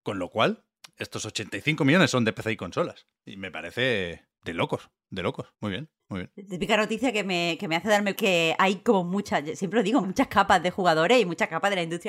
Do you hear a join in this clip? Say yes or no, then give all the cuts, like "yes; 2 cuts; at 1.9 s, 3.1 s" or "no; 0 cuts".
yes; 6 cuts; at 3.2 s, 4.4 s, 5.5 s, 6.0 s, 8.1 s, 10.0 s